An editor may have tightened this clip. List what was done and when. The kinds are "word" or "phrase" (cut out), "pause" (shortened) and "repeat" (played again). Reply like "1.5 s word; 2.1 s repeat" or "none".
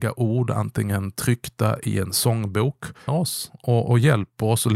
3.1 s phrase